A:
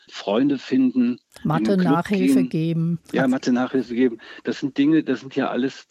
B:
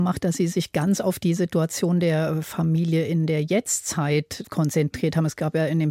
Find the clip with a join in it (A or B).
A